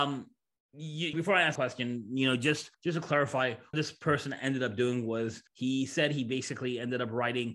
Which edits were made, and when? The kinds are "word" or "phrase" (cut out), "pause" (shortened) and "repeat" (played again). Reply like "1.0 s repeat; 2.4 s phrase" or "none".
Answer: 1.1 s word; 1.6 s word; 2.7 s pause; 3.7 s word; 5.5 s pause

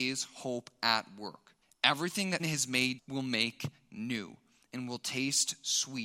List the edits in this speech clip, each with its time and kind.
1.6 s pause; 2.4 s word; 3.0 s phrase

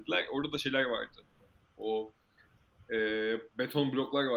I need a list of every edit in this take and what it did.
none

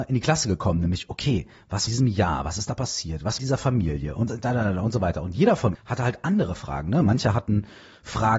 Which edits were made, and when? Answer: 1.9 s phrase; 3.4 s phrase; 4.3 s word; 5.8 s word

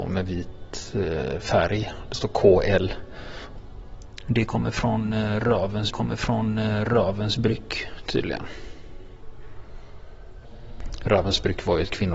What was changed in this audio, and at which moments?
5.9 s repeat

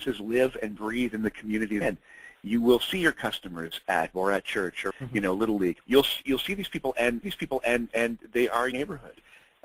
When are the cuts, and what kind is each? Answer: 1.8 s word; 4.1 s phrase; 4.9 s word; 5.8 s pause; 7.2 s repeat; 8.7 s word

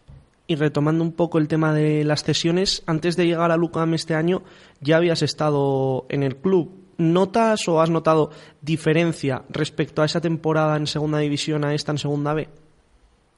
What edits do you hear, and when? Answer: none

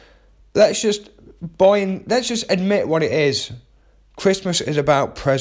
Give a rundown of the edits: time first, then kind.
none

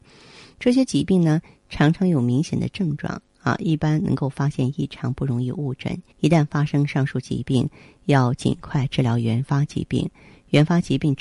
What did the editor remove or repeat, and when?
6.1 s pause

